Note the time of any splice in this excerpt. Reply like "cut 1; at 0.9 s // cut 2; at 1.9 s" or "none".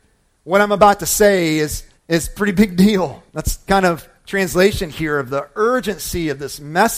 cut 1; at 1.9 s // cut 2; at 3.3 s // cut 3; at 4.2 s